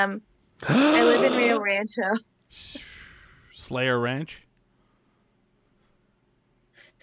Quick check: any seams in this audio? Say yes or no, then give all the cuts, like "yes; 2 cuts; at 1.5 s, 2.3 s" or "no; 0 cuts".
no; 0 cuts